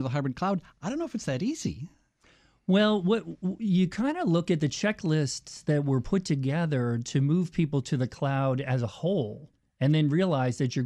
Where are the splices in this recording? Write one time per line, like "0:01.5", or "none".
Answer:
none